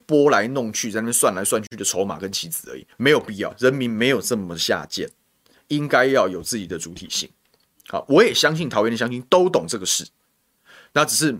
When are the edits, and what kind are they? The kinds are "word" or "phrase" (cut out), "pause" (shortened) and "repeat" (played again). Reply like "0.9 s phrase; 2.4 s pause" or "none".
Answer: 2.9 s pause